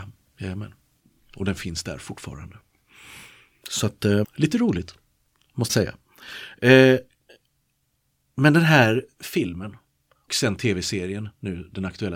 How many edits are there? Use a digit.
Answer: 3